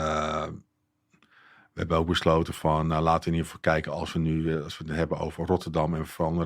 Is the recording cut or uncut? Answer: uncut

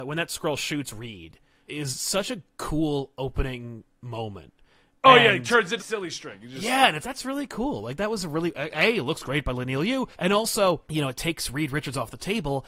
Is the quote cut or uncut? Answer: cut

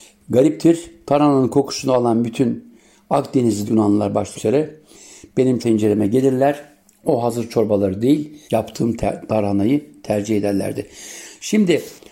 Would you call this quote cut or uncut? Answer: cut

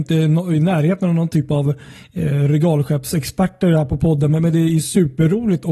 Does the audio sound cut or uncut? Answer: uncut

